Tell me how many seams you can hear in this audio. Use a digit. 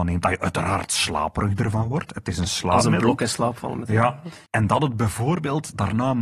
1